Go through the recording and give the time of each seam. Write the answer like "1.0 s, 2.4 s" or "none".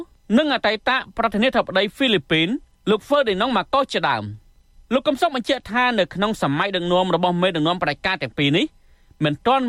none